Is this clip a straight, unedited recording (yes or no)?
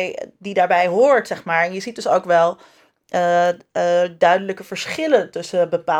yes